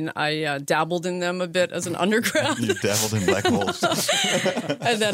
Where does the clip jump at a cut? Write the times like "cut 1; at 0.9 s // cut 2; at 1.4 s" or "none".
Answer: none